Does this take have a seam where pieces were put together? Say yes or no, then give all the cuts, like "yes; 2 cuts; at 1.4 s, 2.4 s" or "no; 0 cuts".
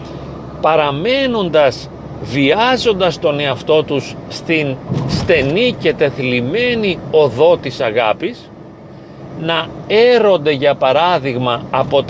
no; 0 cuts